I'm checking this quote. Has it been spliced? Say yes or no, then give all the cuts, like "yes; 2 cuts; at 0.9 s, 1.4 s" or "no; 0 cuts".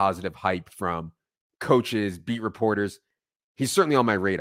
no; 0 cuts